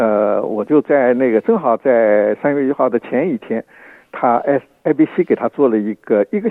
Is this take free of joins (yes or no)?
yes